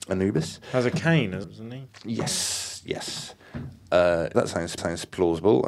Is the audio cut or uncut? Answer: cut